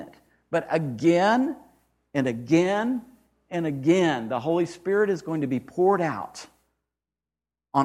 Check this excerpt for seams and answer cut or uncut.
uncut